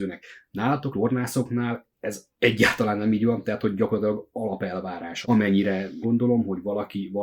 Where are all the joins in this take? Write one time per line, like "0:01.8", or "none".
0:00.9
0:02.3
0:05.2
0:06.0